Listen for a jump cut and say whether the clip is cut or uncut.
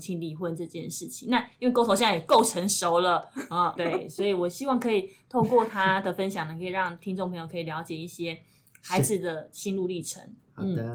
cut